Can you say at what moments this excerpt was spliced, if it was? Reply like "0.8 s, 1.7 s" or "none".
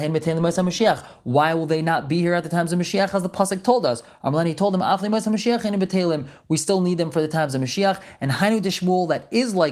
none